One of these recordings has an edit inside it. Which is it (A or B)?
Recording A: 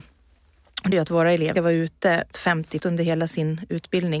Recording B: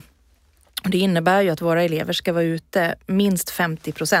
A